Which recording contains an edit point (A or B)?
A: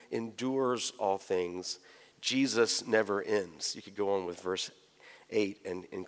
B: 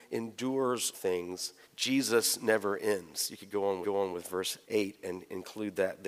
B